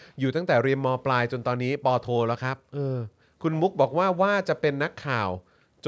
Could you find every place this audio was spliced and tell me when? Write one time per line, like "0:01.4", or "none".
0:03.2